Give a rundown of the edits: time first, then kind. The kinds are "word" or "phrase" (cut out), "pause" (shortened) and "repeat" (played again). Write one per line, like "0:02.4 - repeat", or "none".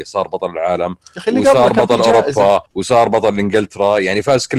0:02.7 - pause

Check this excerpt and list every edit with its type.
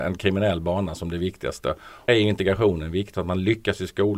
0:02.1 - word
0:03.1 - word

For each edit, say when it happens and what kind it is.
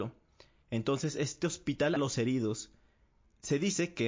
0:02.0 - phrase

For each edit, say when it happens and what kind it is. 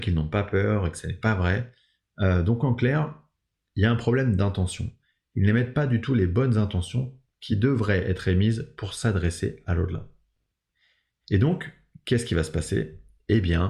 none

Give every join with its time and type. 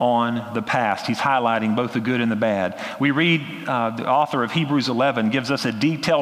none

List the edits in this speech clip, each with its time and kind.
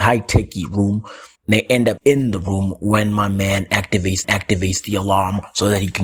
0:01.4 - pause
0:02.0 - phrase
0:04.2 - repeat

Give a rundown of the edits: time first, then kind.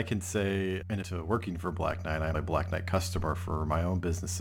0:01.0 - word
0:02.3 - word

